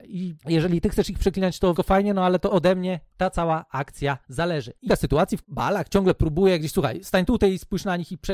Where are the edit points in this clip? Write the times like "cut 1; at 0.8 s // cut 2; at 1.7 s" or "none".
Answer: cut 1; at 1.8 s // cut 2; at 2.5 s // cut 3; at 4.9 s // cut 4; at 5.4 s